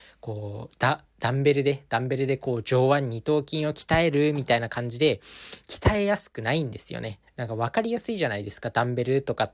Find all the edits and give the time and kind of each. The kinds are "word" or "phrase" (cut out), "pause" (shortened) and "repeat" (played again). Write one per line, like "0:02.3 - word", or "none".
0:07.3 - pause